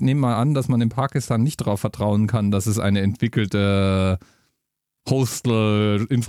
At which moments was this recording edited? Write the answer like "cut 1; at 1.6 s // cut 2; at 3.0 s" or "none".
none